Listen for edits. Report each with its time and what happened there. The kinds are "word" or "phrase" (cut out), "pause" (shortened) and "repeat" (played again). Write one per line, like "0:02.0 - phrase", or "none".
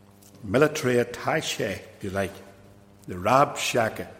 0:02.0 - word